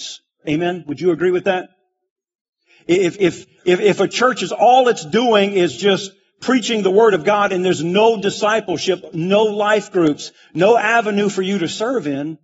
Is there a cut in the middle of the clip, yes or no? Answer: no